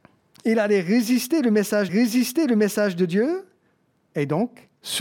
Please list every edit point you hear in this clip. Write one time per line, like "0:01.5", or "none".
0:01.9